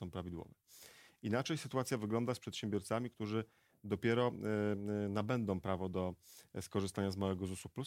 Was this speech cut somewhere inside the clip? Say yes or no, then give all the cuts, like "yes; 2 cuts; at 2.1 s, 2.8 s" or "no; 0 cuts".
no; 0 cuts